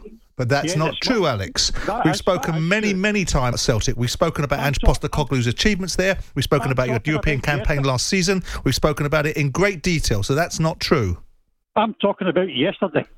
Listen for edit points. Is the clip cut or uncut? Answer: cut